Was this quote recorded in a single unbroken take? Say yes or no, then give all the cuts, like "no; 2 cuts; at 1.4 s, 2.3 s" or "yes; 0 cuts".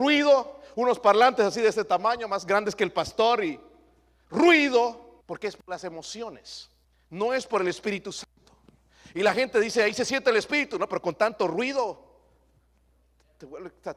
no; 2 cuts; at 5.2 s, 6.8 s